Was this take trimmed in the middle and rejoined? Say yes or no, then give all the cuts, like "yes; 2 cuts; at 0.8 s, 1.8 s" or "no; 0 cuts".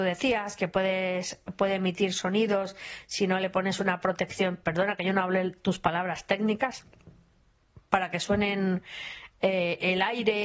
no; 0 cuts